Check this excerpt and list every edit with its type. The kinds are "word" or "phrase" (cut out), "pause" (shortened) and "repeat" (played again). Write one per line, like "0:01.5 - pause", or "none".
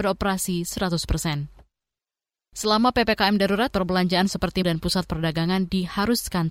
0:03.7 - word
0:04.6 - word